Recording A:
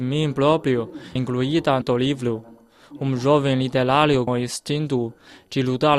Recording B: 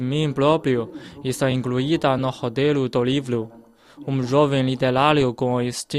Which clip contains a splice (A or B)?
A